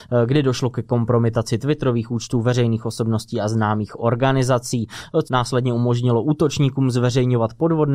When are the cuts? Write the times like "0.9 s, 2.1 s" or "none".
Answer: 5.2 s